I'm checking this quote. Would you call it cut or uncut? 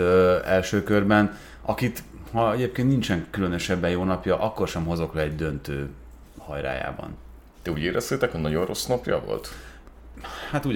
uncut